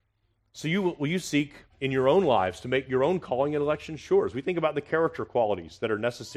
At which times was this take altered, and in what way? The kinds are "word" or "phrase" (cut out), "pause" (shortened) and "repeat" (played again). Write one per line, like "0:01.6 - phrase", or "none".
0:01.7 - pause